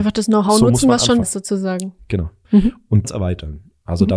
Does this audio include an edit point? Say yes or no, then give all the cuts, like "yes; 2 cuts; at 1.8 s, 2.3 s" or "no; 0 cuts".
yes; 2 cuts; at 1.2 s, 3.0 s